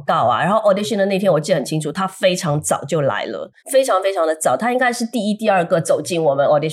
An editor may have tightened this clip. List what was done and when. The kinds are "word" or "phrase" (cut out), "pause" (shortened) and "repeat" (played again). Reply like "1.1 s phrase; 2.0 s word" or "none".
3.6 s pause